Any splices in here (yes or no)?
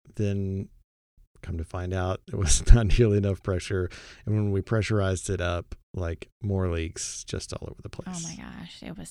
no